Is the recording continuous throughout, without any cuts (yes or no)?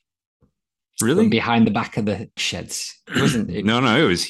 no